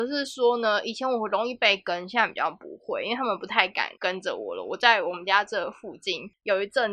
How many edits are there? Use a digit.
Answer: 1